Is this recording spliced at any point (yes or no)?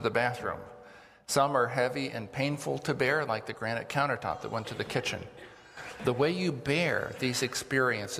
no